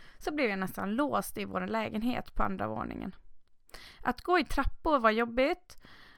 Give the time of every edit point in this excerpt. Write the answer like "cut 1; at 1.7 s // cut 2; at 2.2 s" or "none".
none